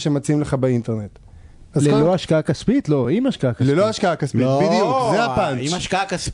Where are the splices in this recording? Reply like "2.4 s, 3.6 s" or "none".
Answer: none